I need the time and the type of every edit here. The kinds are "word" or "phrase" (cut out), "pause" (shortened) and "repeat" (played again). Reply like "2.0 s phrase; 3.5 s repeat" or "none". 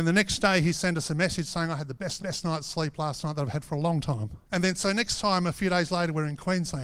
2.2 s repeat; 4.4 s pause